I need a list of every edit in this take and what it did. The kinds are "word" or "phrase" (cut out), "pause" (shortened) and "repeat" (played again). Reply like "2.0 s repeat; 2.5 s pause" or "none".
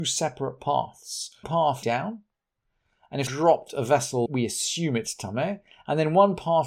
1.4 s word; 1.8 s word; 3.3 s word; 4.3 s word